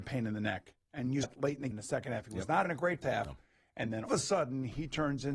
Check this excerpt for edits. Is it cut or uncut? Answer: cut